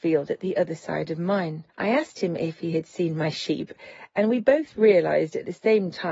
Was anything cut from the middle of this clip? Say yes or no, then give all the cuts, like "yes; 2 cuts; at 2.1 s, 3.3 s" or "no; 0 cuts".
yes; 1 cut; at 1.7 s